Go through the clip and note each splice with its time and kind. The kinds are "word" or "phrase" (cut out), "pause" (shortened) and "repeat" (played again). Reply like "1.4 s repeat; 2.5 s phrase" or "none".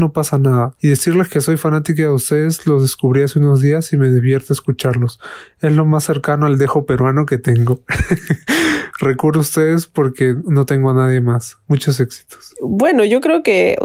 11.6 s pause